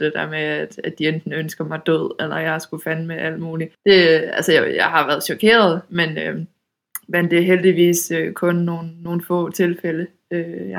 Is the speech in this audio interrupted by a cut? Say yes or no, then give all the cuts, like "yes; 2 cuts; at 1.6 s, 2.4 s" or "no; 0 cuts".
yes; 1 cut; at 3.7 s